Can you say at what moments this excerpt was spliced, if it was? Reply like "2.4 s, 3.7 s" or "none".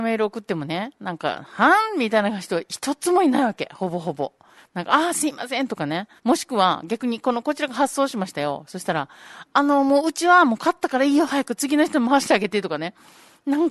4.6 s, 6.2 s